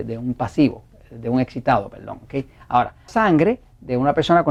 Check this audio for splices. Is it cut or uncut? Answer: cut